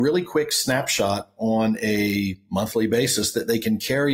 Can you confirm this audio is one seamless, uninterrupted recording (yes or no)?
yes